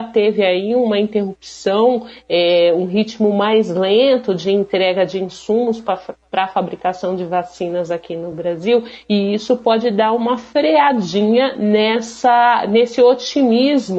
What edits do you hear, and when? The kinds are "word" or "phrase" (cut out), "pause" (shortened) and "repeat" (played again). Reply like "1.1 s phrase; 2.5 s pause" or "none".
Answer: none